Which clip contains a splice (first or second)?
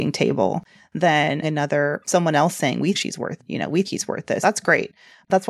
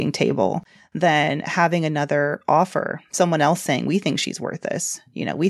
first